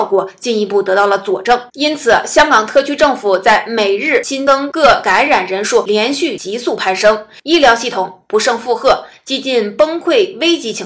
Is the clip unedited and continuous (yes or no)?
no